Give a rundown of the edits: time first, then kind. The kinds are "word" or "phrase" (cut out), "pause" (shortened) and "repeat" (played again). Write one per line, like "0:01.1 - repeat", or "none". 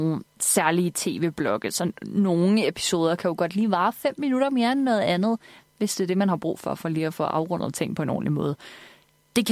none